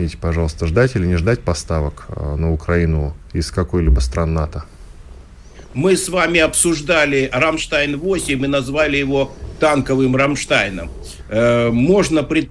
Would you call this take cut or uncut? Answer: uncut